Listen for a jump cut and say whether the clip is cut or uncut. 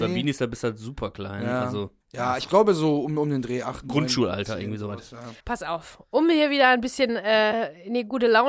cut